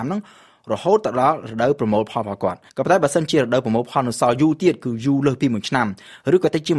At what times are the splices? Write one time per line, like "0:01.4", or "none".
0:02.7